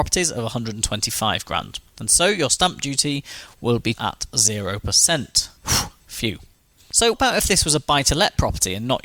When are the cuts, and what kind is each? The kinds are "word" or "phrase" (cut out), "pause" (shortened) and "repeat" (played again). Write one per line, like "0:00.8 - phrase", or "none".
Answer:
0:03.9 - word
0:05.6 - pause
0:07.1 - word